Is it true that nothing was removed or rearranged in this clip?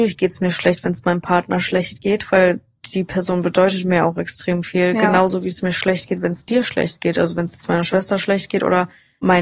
yes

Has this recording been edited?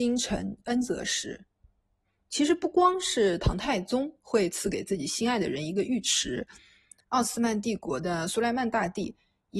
yes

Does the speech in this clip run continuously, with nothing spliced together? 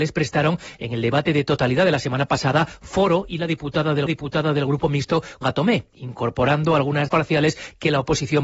no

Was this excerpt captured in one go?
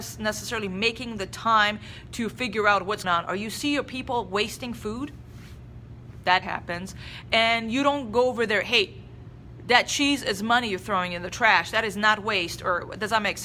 no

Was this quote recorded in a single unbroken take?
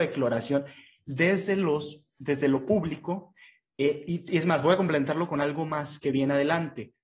yes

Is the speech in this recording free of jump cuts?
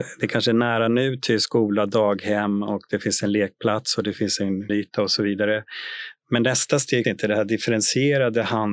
no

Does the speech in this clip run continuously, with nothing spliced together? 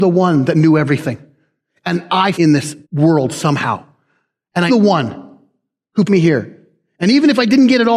no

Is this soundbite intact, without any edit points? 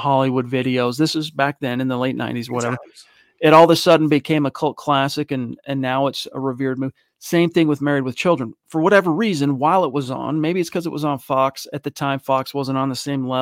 no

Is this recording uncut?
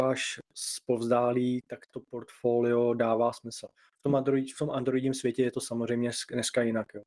yes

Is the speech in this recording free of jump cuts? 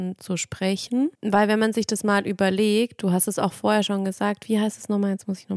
no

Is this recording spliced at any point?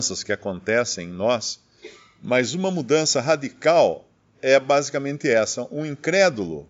no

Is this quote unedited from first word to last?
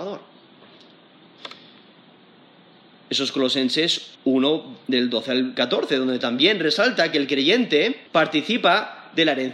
no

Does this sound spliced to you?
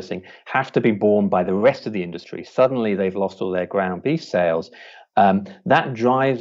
no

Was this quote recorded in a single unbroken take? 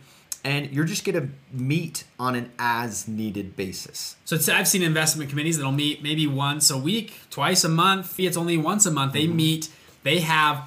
no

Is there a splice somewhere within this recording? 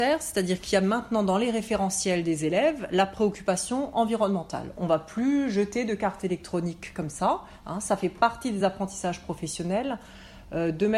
no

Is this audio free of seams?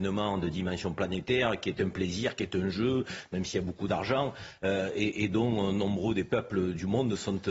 yes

